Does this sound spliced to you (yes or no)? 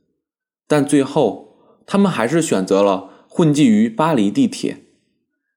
no